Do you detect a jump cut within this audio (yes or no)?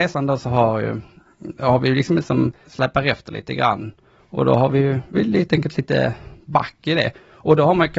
yes